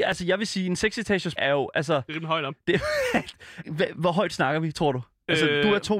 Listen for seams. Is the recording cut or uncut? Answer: cut